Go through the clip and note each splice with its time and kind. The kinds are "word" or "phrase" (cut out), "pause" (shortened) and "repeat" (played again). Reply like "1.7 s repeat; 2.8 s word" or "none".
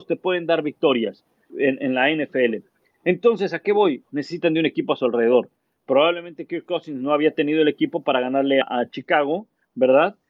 1.5 s word; 8.6 s word